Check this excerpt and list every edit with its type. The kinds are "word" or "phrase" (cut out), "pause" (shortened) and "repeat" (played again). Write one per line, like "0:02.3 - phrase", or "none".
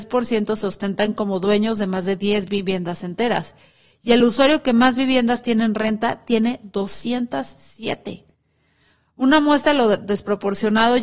none